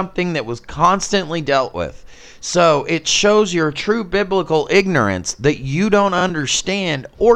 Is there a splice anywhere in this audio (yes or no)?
no